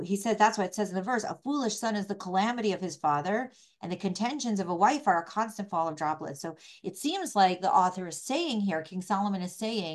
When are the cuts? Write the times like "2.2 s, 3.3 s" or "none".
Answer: none